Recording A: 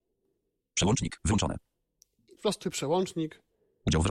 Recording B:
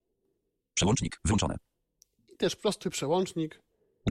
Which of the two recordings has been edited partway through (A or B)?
A